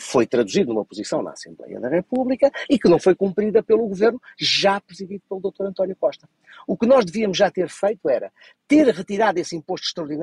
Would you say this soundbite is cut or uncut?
uncut